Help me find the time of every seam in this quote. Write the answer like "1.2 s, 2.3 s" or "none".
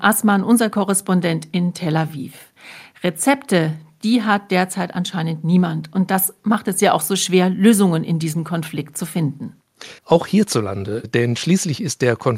10.0 s